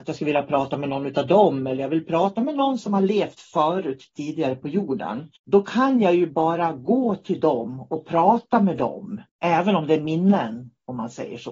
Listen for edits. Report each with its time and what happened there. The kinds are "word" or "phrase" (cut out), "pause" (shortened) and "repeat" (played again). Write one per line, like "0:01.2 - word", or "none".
0:05.4 - pause
0:09.3 - pause